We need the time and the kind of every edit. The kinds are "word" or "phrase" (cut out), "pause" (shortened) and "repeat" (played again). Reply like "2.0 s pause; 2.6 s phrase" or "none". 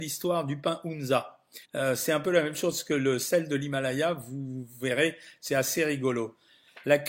1.6 s pause